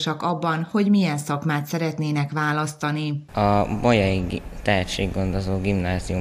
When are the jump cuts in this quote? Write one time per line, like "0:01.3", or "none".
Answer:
none